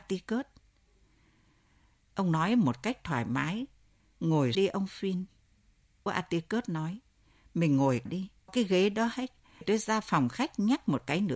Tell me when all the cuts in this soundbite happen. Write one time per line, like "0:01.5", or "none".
0:04.5
0:06.1
0:08.1
0:08.5
0:09.6